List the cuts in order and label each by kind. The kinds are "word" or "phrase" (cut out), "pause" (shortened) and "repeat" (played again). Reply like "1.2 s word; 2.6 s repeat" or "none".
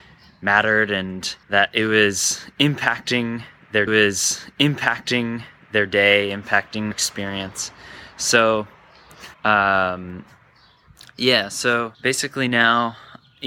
1.4 s pause; 3.9 s repeat; 6.9 s word; 9.3 s pause; 11.9 s pause